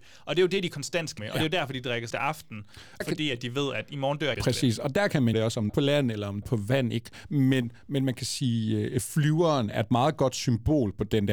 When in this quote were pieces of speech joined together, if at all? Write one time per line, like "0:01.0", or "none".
0:01.2
0:02.1
0:03.0
0:04.3
0:05.3
0:05.7
0:06.4